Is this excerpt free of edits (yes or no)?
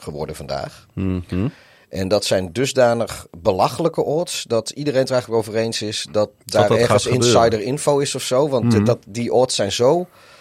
yes